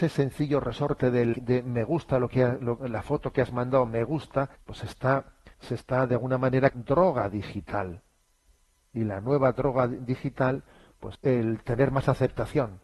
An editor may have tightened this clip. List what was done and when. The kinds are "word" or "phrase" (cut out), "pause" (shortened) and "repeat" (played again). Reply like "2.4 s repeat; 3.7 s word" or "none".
1.3 s word; 4.6 s pause; 5.5 s pause; 6.7 s phrase; 11.1 s word